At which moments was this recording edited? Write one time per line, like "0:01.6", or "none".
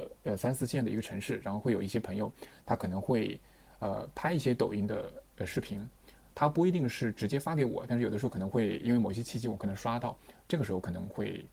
none